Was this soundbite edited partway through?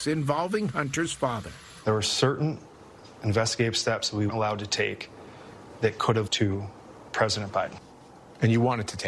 yes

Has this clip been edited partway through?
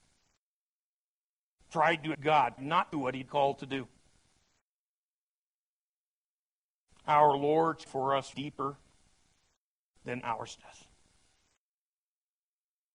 yes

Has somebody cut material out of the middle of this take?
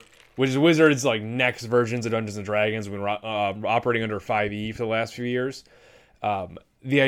no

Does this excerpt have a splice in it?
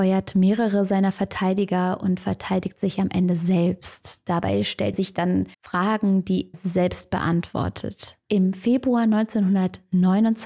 yes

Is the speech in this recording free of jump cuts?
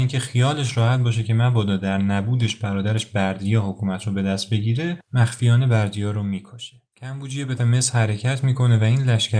no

